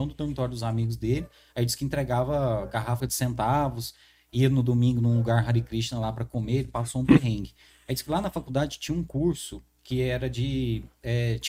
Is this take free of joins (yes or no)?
no